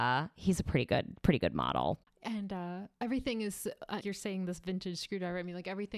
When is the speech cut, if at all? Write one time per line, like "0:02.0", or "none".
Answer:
0:02.0
0:02.9
0:04.0